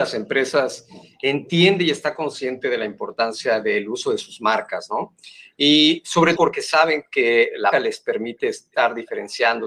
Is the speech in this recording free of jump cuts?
no; 2 cuts; at 6.4 s, 7.7 s

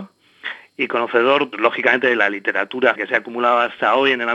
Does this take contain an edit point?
yes; 2 cuts; at 1.5 s, 3.0 s

